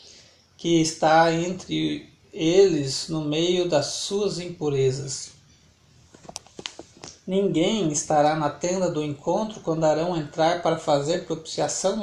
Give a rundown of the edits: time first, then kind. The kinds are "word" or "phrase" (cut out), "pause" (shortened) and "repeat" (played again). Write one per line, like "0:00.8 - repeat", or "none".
none

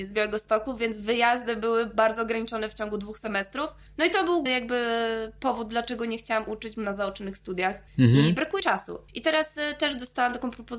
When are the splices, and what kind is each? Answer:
0:03.9 - pause
0:04.5 - word
0:06.7 - phrase
0:07.9 - pause
0:08.6 - word
0:09.1 - pause

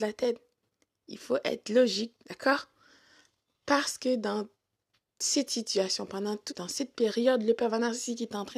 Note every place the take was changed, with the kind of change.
0:02.2 - pause
0:06.5 - word

